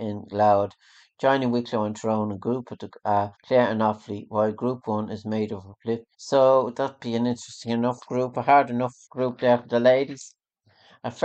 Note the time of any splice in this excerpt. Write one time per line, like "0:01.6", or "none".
0:03.3
0:06.1
0:09.0